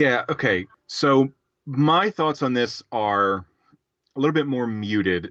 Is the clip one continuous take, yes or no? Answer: yes